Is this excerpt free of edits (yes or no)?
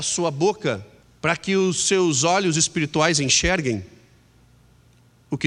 no